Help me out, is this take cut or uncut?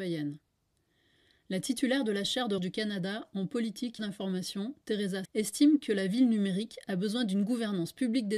cut